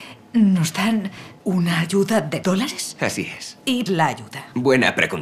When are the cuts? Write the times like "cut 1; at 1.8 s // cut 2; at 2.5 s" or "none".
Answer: cut 1; at 1.4 s // cut 2; at 2.4 s // cut 3; at 3.9 s